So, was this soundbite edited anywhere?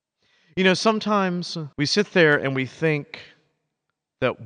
yes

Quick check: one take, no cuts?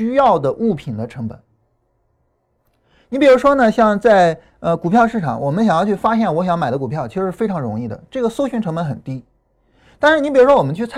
yes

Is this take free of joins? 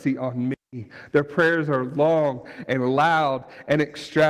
yes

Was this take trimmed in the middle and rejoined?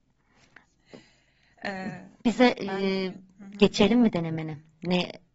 no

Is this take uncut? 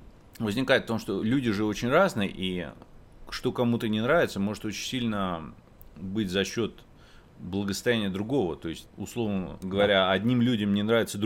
yes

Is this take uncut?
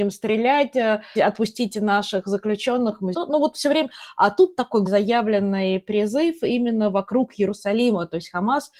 no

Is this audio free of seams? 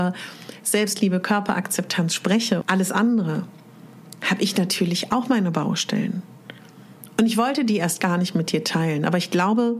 no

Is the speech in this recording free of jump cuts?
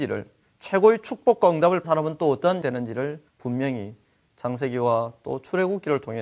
no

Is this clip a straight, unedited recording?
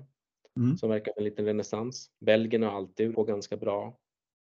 no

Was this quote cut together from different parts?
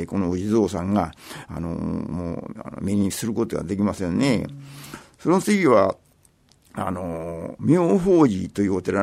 no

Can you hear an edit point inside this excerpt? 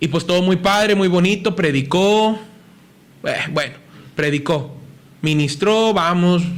no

